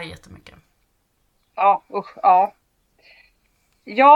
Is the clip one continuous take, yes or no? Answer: yes